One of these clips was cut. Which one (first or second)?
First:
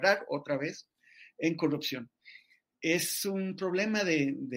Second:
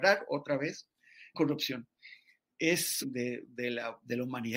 second